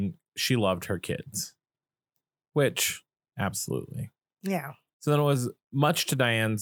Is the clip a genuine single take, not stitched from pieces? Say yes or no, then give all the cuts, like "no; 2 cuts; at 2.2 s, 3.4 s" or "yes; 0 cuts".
yes; 0 cuts